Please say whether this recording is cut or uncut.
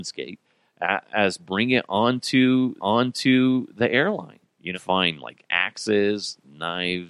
cut